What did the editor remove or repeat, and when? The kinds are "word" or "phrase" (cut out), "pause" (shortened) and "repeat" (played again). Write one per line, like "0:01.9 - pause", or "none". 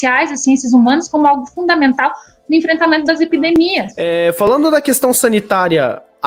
none